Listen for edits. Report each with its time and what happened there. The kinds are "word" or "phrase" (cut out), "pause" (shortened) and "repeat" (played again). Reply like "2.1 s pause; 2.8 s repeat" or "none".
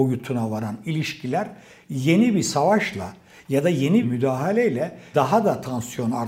4.0 s word; 5.1 s word